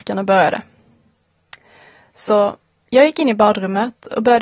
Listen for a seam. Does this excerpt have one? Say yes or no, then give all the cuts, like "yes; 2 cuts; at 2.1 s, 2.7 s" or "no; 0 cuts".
no; 0 cuts